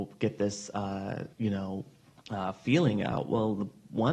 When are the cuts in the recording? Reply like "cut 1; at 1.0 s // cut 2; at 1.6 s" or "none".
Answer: cut 1; at 1.3 s // cut 2; at 2.2 s